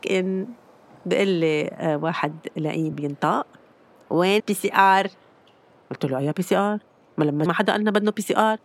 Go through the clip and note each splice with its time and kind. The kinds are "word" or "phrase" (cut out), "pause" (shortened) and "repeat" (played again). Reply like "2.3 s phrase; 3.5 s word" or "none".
2.9 s word; 4.4 s word; 7.5 s word